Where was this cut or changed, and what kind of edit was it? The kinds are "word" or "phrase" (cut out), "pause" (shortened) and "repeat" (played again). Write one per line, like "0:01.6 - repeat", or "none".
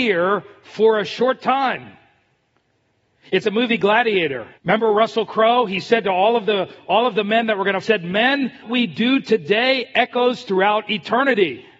0:03.4 - word
0:04.5 - pause
0:07.8 - phrase
0:08.6 - phrase